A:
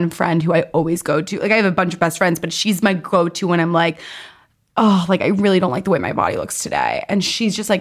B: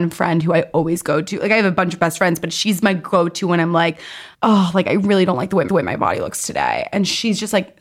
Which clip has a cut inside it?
B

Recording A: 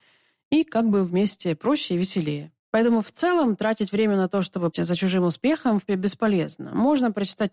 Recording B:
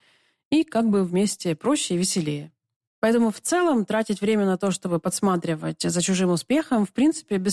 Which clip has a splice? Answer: A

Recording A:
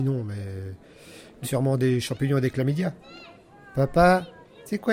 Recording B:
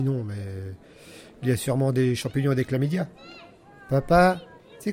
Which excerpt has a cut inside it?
A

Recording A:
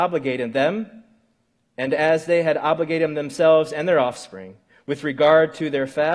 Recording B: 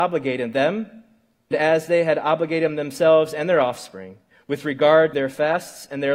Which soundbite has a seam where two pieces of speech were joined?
B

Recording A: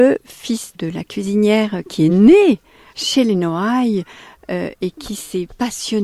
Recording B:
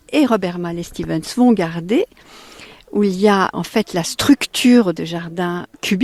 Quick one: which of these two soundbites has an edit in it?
B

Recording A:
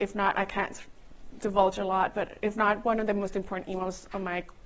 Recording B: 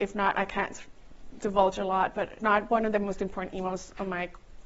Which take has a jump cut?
B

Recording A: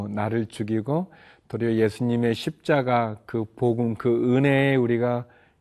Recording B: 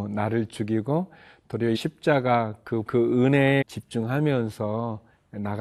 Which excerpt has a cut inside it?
B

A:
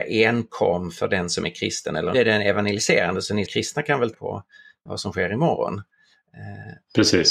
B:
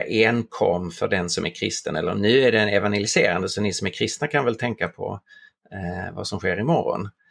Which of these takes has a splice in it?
A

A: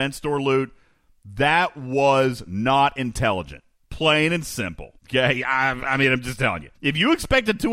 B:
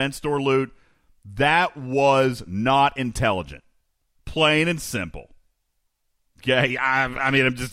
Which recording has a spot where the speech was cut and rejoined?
A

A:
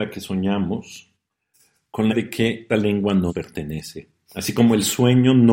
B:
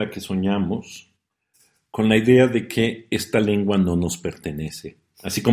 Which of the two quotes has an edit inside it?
A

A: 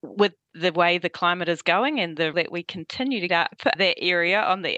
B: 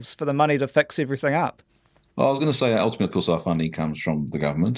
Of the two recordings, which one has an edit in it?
A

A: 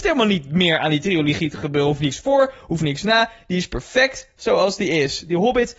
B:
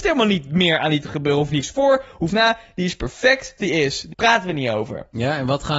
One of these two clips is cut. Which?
B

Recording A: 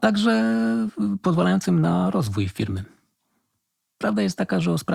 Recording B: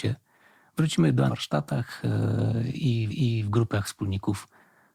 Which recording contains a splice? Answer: B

